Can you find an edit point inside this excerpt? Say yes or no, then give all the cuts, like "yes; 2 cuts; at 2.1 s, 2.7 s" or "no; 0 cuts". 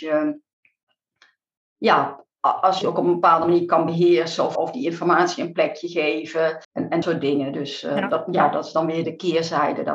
yes; 5 cuts; at 2.8 s, 4.6 s, 6.6 s, 7.0 s, 9.0 s